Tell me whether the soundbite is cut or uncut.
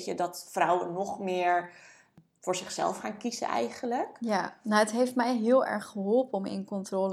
uncut